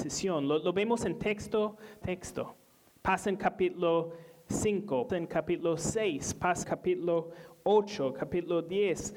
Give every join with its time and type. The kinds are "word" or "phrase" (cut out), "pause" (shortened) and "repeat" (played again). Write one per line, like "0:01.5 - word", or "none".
0:02.0 - word
0:05.1 - word
0:06.6 - word